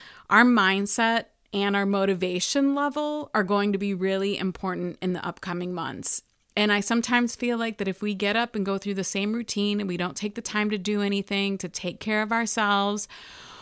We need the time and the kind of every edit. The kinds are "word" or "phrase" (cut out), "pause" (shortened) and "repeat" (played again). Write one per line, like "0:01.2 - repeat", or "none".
none